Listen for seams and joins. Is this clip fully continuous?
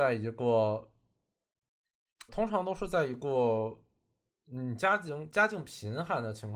no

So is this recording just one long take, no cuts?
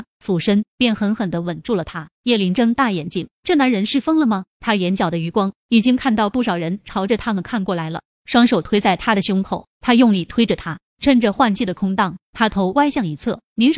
no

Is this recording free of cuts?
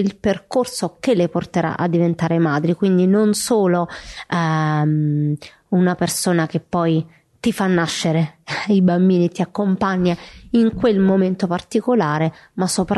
yes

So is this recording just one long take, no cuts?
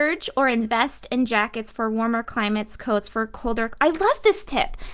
yes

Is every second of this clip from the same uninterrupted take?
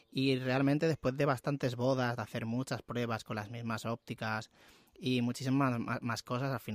yes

